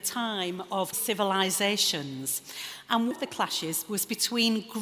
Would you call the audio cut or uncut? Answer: cut